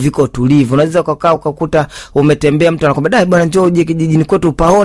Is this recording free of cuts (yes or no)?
yes